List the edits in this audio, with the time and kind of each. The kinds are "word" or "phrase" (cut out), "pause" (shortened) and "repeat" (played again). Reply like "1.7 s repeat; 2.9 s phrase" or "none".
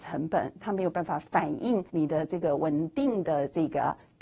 1.9 s pause